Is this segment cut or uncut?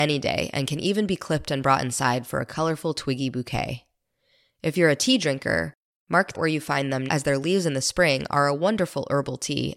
cut